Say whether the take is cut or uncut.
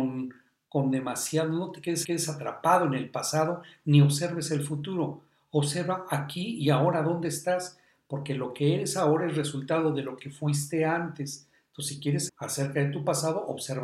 cut